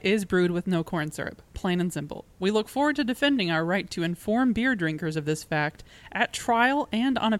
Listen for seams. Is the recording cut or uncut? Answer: uncut